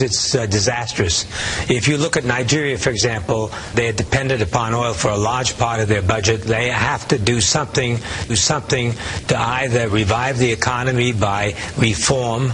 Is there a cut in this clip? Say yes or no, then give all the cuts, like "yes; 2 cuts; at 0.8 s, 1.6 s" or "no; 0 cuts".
yes; 3 cuts; at 3.7 s, 6.5 s, 8.3 s